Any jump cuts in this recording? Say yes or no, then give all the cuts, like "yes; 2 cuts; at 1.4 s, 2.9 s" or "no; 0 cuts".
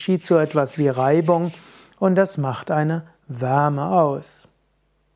no; 0 cuts